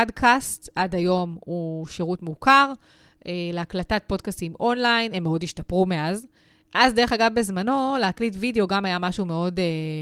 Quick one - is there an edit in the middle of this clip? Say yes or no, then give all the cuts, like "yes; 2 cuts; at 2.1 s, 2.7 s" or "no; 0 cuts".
no; 0 cuts